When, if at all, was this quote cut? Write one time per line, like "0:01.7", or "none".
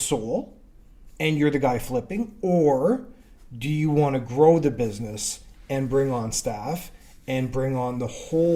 none